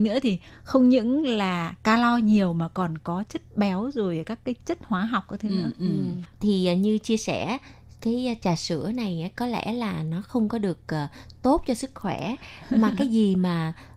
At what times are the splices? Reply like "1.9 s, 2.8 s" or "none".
none